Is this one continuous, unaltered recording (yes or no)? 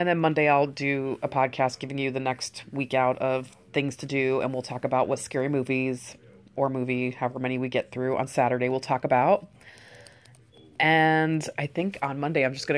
yes